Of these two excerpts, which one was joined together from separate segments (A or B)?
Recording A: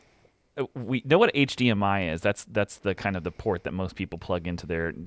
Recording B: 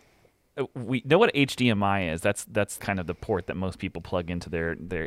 B